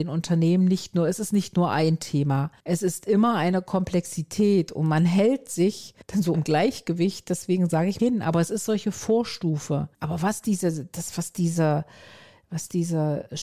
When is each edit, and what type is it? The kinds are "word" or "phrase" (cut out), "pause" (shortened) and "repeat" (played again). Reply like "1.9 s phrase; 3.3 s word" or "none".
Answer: 2.6 s pause; 6.0 s pause; 6.3 s word; 8.0 s phrase; 9.9 s pause